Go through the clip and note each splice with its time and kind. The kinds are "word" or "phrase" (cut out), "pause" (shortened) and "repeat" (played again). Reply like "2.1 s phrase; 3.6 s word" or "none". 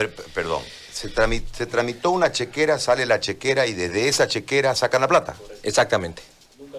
none

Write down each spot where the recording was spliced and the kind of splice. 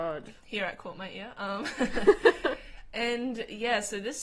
none

